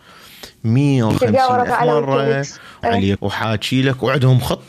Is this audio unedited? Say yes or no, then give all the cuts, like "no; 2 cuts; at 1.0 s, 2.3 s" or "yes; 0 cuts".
no; 3 cuts; at 1.7 s, 2.8 s, 3.2 s